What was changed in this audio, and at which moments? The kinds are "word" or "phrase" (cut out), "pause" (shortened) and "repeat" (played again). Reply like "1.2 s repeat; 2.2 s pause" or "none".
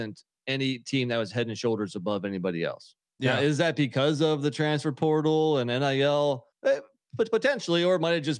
3.0 s pause; 6.5 s pause

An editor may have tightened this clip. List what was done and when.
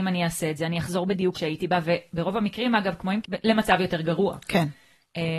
1.3 s word; 3.2 s word

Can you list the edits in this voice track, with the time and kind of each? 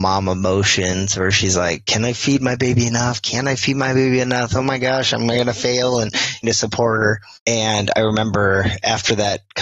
6.4 s phrase; 7.4 s pause

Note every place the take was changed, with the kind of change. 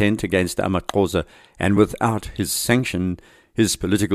none

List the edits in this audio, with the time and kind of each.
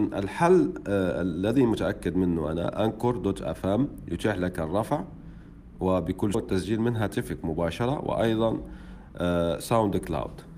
6.3 s word

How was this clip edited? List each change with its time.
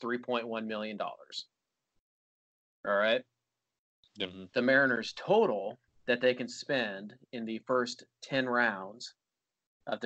none

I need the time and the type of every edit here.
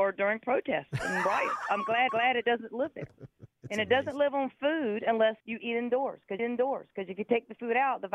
2.1 s repeat; 5.4 s pause; 6.4 s repeat

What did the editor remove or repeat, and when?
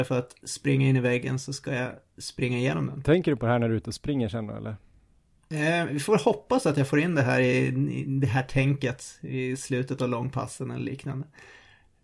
none

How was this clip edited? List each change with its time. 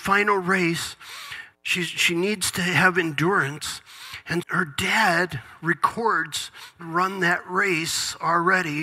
1.5 s pause; 4.4 s word; 6.8 s phrase

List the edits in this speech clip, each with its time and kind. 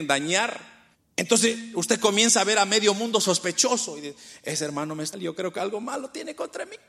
0.9 s pause; 5.1 s phrase

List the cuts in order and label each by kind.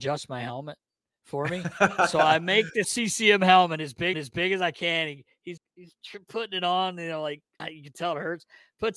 2.8 s word; 4.1 s repeat; 5.6 s word; 7.6 s word

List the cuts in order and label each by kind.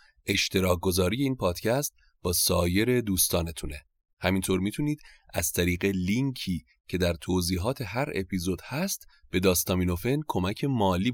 none

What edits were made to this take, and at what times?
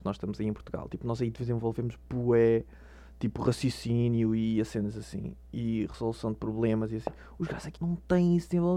7.8 s word

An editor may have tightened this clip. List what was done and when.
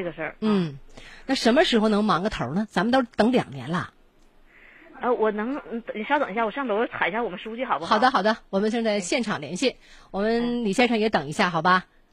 none

